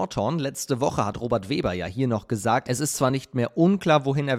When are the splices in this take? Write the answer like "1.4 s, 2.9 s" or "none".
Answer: none